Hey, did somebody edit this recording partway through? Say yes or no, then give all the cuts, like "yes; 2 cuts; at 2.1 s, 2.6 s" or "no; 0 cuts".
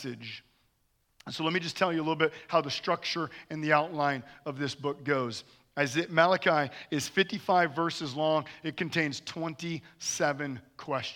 no; 0 cuts